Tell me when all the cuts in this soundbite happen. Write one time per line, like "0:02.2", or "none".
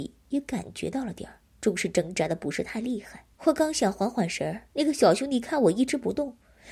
0:01.5
0:03.3
0:04.7